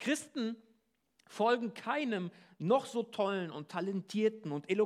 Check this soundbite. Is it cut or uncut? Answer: uncut